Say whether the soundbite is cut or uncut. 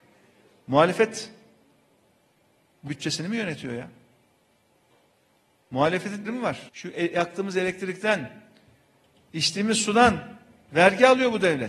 cut